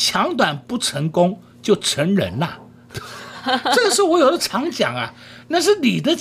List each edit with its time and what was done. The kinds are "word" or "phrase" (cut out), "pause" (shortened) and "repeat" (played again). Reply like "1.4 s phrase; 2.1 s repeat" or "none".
none